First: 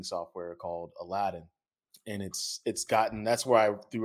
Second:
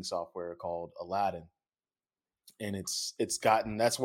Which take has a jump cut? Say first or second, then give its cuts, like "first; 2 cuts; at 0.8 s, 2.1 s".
first; 1 cut; at 1.9 s